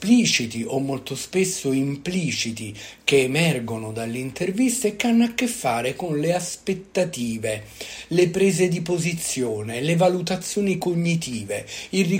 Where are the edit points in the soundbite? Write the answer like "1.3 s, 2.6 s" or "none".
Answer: none

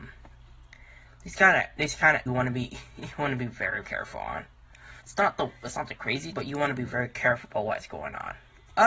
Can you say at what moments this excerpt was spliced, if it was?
2.3 s, 3.8 s, 5.0 s, 6.3 s, 6.9 s

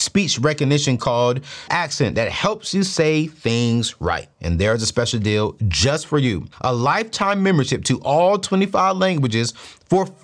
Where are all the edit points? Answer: 1.7 s, 4.3 s, 6.5 s

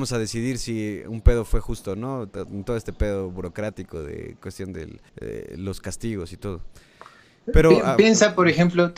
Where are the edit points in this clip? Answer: 5.1 s

